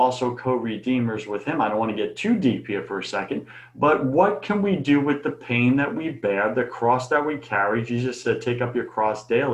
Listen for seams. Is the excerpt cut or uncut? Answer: uncut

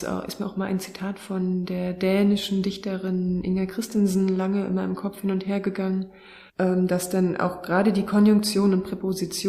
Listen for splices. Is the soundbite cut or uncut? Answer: cut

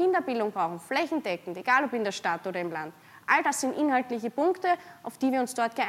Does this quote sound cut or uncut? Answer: uncut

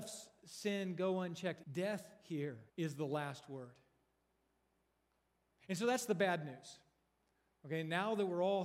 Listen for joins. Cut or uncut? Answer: cut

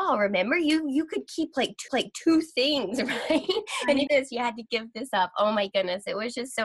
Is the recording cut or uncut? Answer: cut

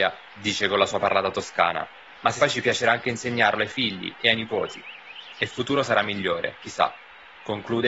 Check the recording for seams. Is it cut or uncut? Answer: cut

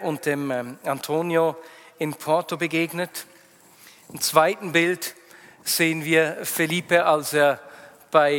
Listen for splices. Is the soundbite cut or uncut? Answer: uncut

